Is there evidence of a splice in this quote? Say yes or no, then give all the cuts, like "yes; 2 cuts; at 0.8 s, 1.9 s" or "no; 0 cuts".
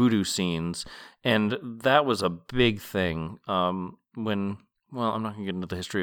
no; 0 cuts